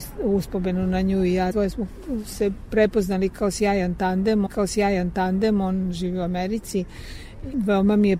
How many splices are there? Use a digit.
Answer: 2